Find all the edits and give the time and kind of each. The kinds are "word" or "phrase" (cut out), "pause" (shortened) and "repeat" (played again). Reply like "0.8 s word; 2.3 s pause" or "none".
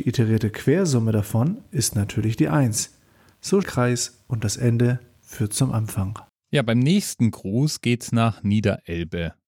3.6 s phrase; 6.3 s pause